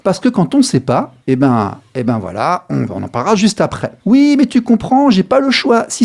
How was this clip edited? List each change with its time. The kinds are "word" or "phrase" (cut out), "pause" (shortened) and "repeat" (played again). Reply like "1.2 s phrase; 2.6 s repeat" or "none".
none